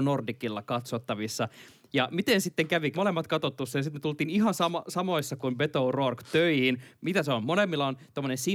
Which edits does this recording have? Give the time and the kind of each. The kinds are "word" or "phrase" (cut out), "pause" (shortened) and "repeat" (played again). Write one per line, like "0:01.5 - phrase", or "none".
0:02.9 - word
0:05.4 - word